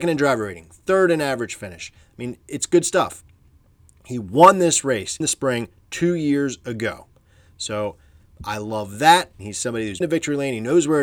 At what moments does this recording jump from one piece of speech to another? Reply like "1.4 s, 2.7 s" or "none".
5.2 s, 9.4 s, 10.0 s